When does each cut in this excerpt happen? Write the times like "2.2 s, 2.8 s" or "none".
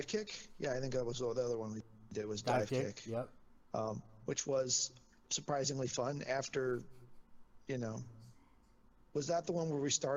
none